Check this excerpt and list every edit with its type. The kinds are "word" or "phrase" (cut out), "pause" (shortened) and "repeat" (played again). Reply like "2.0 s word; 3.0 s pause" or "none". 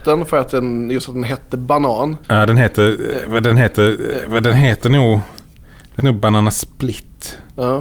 2.2 s pause; 3.5 s repeat; 6.0 s word